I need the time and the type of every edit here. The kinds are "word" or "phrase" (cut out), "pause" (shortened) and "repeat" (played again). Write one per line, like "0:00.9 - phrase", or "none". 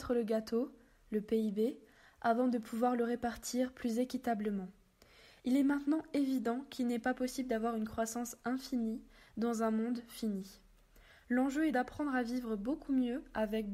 0:11.7 - word